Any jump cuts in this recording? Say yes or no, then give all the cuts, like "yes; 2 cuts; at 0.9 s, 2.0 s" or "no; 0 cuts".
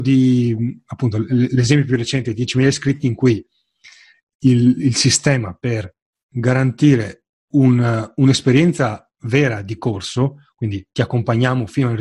no; 0 cuts